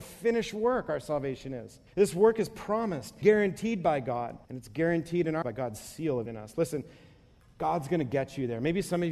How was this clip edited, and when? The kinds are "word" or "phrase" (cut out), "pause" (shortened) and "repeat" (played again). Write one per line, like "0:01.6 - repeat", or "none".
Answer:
0:01.9 - pause
0:03.2 - word
0:04.4 - pause
0:05.4 - word
0:06.3 - phrase